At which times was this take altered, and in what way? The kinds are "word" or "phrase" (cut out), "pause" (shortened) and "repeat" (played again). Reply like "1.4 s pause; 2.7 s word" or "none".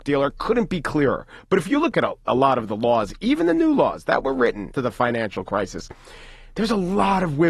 4.7 s phrase